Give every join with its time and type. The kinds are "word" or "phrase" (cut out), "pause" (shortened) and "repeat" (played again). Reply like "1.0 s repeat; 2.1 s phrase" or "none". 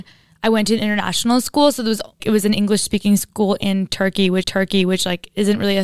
2.2 s phrase; 4.4 s repeat